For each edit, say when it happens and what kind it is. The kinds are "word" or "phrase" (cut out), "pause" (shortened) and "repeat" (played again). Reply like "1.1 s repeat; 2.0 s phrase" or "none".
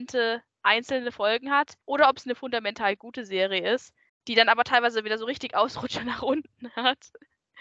1.8 s pause; 4.1 s pause